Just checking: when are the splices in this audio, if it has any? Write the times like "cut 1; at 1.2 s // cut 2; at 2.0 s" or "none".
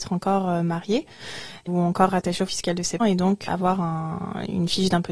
cut 1; at 1.7 s // cut 2; at 2.5 s // cut 3; at 3.0 s // cut 4; at 3.5 s